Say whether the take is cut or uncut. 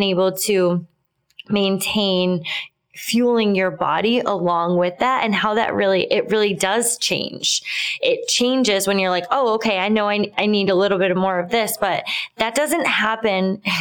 uncut